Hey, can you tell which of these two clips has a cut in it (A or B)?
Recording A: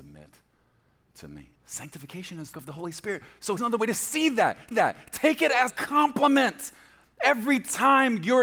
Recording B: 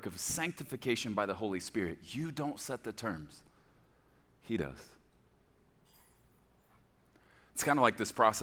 A